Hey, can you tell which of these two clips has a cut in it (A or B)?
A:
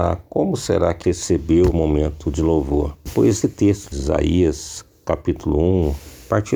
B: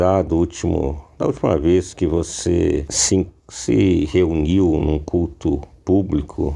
A